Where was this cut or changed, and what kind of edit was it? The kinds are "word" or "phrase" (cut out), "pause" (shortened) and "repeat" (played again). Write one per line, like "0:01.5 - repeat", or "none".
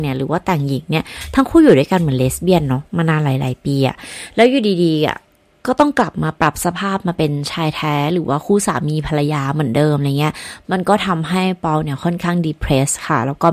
none